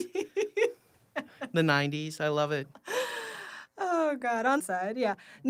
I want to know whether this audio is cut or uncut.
cut